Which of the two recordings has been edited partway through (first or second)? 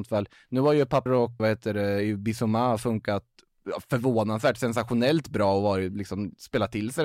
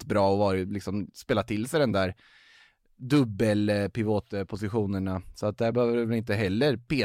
first